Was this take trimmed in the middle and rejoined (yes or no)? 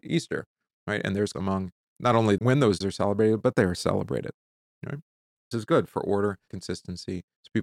yes